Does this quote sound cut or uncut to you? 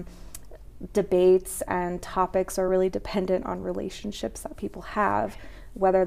uncut